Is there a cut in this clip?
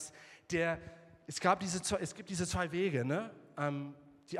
no; 0 cuts

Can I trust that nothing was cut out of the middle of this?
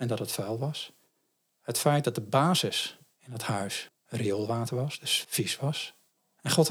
yes; 0 cuts

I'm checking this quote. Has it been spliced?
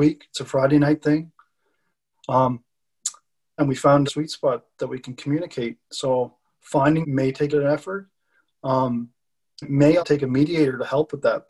yes; 6 cuts; at 3.6 s, 4.1 s, 7.0 s, 7.5 s, 9.6 s, 10.0 s

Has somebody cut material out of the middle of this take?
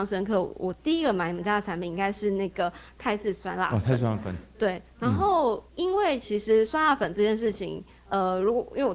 yes; 1 cut; at 5.7 s

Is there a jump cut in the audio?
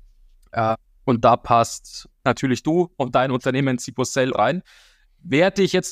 yes; 1 cut; at 4.3 s

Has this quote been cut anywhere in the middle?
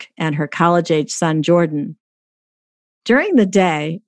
no; 0 cuts

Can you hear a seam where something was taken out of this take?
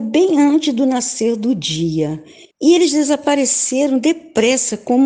yes; 1 cut; at 2.5 s

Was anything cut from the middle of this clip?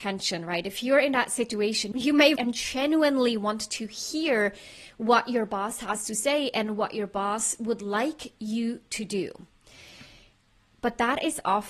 yes; 1 cut; at 2.4 s

